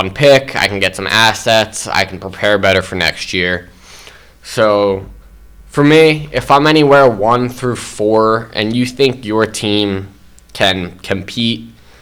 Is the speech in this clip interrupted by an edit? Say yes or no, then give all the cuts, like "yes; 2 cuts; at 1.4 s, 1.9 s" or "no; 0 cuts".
no; 0 cuts